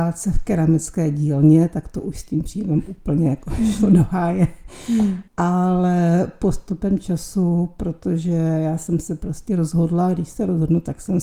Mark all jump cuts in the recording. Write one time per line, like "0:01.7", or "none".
0:05.3